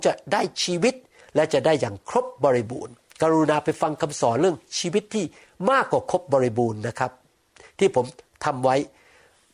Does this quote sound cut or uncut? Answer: uncut